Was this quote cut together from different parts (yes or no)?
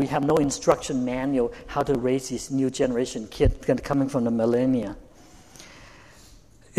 no